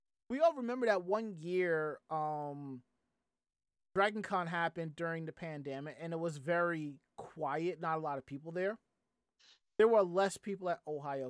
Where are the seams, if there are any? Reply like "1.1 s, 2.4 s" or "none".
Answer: none